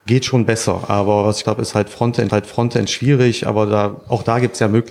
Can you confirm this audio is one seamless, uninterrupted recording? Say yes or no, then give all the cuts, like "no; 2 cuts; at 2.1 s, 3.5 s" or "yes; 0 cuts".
no; 2 cuts; at 1.4 s, 2.3 s